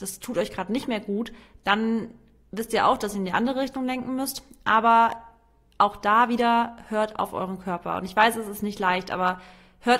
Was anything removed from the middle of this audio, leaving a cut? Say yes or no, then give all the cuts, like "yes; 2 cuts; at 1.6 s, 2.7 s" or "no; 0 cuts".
no; 0 cuts